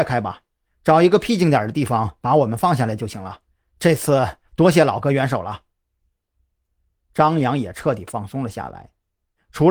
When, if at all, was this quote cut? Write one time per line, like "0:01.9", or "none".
none